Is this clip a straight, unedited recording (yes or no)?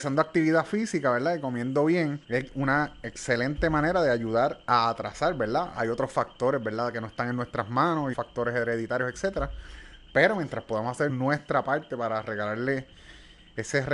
no